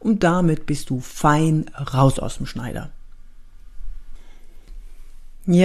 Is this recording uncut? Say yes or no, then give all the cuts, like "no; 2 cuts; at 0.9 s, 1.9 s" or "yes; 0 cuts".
yes; 0 cuts